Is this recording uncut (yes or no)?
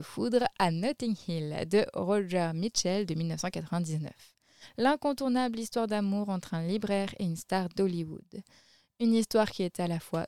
yes